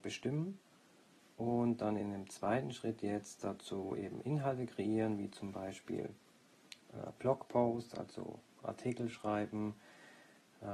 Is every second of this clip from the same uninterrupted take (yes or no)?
yes